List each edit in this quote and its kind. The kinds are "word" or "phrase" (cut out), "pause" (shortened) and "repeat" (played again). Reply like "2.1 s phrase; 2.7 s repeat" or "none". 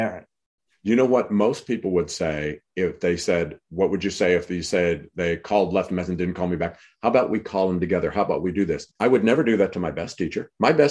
8.9 s pause